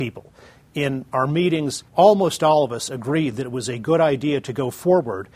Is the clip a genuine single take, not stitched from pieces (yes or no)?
no